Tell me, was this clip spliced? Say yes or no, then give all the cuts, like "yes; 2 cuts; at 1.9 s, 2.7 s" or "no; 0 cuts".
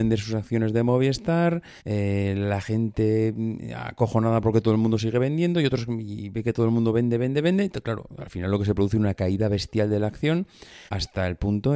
yes; 2 cuts; at 1.8 s, 10.9 s